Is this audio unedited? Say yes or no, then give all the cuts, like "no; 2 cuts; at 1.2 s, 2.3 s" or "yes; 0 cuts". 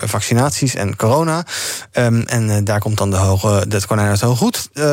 yes; 0 cuts